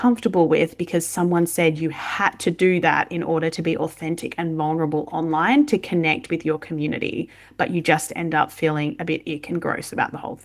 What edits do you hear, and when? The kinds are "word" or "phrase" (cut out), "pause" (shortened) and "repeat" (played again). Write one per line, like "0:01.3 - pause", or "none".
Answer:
none